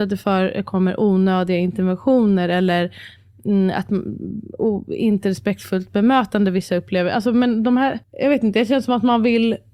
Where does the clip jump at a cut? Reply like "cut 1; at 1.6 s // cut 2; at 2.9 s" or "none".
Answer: cut 1; at 8.0 s